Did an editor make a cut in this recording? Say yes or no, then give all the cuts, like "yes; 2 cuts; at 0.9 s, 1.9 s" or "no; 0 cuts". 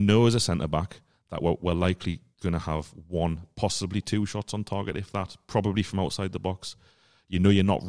no; 0 cuts